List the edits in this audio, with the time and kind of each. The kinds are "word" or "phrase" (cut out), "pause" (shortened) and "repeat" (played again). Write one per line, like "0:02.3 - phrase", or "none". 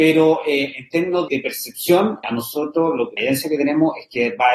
0:01.3 - word
0:02.2 - word
0:03.2 - word